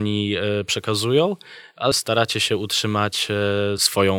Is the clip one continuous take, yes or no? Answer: no